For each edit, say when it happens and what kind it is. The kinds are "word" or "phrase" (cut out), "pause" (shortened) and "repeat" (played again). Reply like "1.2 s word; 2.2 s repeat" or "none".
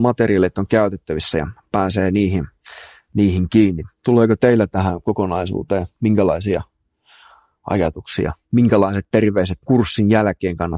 3.9 s pause; 8.4 s pause; 9.6 s pause